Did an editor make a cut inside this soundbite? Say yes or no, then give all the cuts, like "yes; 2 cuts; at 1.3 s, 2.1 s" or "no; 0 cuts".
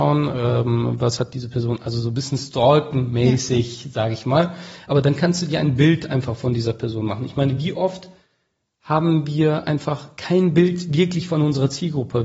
no; 0 cuts